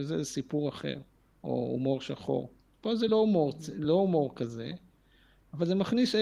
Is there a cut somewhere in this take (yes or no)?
no